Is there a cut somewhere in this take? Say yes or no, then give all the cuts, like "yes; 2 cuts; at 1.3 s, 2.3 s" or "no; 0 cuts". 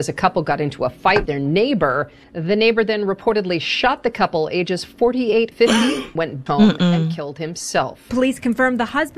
yes; 4 cuts; at 1.3 s, 5.5 s, 6.2 s, 6.5 s